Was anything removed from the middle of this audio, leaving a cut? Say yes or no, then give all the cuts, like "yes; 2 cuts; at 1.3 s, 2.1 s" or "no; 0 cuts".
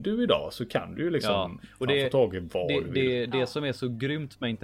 no; 0 cuts